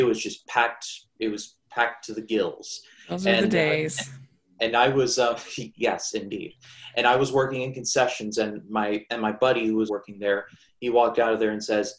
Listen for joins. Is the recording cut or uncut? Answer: cut